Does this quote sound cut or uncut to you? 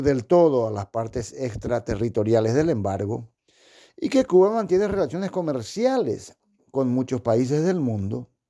uncut